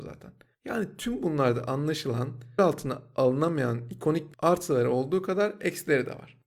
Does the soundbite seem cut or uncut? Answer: cut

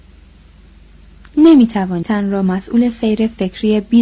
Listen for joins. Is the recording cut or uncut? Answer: cut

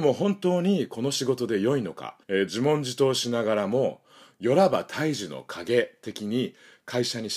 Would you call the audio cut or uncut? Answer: cut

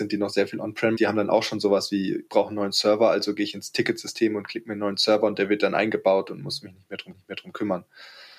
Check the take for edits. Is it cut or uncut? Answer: cut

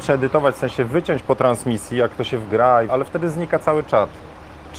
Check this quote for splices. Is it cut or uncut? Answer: cut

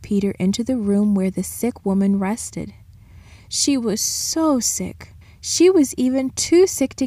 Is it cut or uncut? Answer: cut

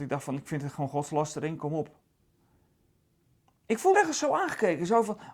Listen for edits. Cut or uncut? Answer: cut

